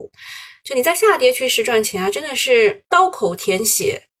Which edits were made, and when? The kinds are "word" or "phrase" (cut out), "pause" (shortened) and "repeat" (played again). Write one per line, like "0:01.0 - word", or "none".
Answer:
0:02.9 - pause